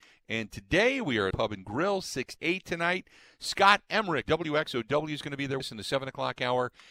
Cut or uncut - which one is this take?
cut